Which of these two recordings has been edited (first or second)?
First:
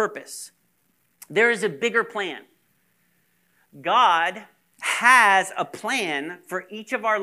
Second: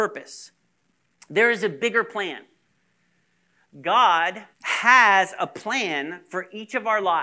second